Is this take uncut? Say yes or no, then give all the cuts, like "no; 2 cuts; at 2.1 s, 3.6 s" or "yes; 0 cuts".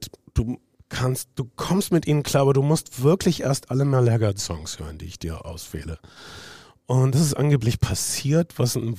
yes; 0 cuts